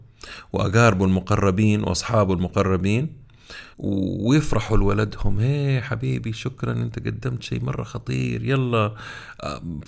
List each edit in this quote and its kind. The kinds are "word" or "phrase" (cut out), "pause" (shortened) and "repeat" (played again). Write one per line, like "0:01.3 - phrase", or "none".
0:03.7 - pause